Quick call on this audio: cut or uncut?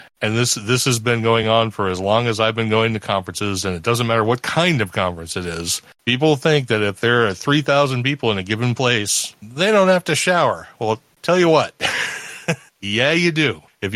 uncut